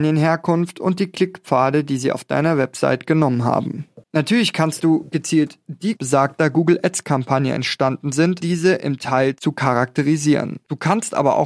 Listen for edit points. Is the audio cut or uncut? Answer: cut